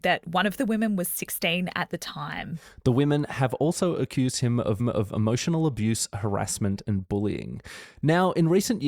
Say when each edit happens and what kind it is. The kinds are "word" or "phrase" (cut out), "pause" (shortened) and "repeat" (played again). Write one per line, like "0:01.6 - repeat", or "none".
0:04.8 - repeat